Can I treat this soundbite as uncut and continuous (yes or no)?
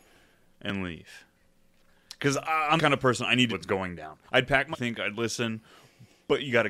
no